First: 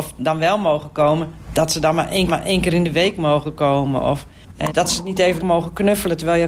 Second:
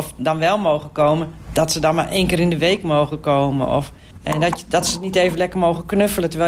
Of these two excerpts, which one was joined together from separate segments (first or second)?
first